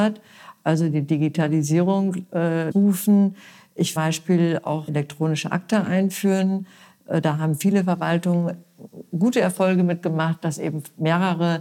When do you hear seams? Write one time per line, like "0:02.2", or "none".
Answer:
0:02.7
0:04.0
0:04.9